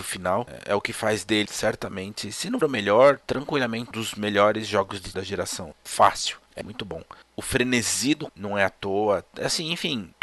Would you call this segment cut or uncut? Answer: cut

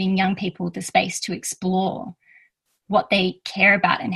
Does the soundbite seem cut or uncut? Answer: uncut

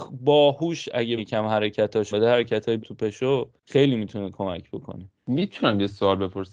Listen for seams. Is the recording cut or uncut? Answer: cut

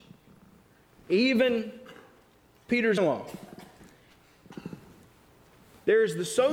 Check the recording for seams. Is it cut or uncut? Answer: cut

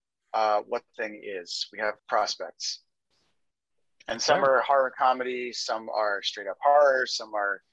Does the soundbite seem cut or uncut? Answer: cut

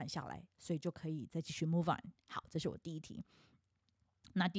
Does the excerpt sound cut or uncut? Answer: uncut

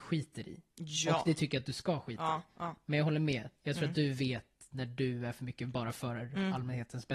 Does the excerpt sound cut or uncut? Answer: uncut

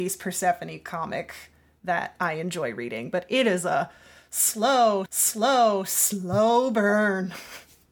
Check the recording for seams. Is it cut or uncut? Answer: cut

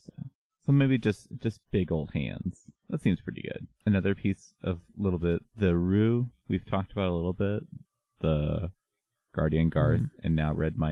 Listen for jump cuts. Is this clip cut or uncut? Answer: uncut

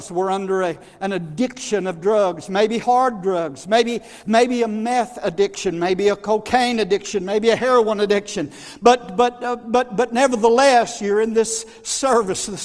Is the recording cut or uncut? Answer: uncut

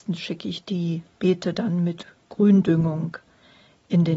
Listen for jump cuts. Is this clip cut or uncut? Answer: uncut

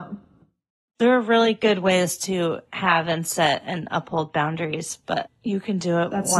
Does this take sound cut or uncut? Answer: uncut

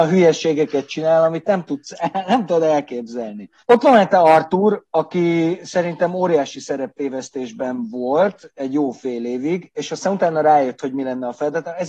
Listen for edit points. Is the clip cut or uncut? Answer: cut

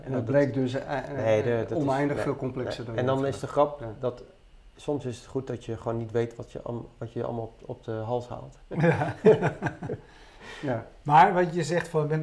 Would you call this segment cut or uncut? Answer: uncut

